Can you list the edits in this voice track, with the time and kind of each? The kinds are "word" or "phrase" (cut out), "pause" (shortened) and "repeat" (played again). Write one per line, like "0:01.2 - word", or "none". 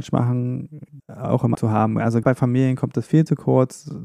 0:01.0 - phrase
0:01.5 - word
0:02.2 - word

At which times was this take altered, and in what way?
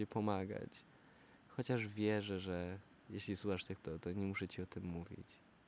0:03.8 - word

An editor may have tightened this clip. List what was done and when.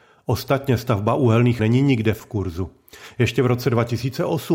0:01.6 - word
0:02.2 - word

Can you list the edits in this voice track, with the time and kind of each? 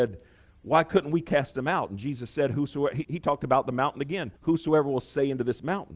0:03.0 - word
0:04.4 - pause

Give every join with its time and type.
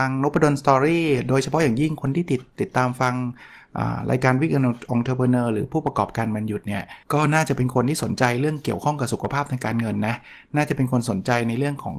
0:07.0 - pause

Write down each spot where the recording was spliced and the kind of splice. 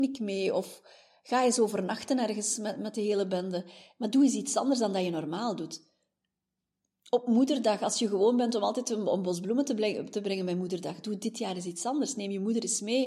none

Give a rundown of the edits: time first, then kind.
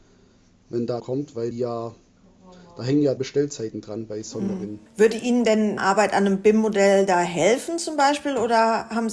0:01.0 - phrase
0:01.5 - word
0:03.2 - phrase
0:04.9 - pause
0:05.8 - word

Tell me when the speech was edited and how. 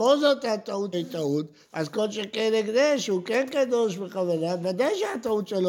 0:00.9 - word

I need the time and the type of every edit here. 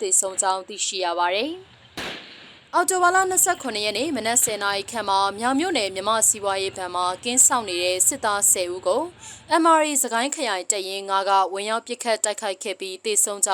none

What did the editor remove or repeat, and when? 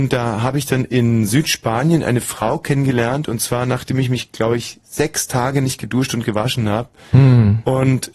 none

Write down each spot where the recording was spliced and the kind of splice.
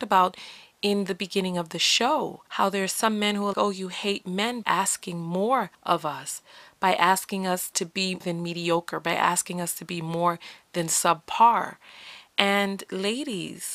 0:02.5 - pause
0:03.5 - word
0:04.6 - word
0:05.7 - pause
0:08.2 - word

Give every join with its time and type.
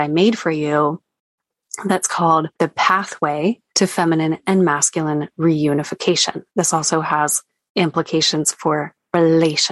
0:02.5 - pause
0:03.7 - pause
0:06.5 - pause

